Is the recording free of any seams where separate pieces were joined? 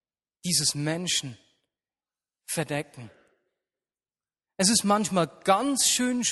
yes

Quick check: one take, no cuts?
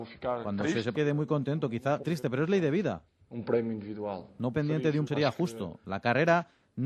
no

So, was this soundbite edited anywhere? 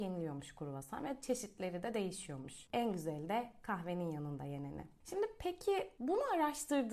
no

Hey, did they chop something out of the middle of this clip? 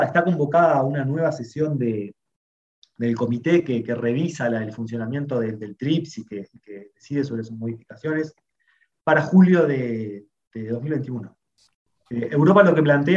no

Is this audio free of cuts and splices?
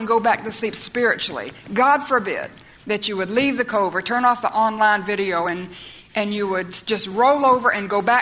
yes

